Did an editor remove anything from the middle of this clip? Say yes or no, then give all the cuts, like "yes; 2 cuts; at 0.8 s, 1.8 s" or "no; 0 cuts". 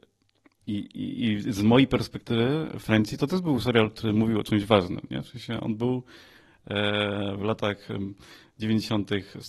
no; 0 cuts